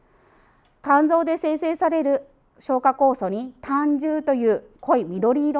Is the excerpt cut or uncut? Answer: uncut